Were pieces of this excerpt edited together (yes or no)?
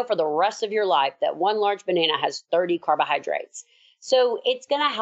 no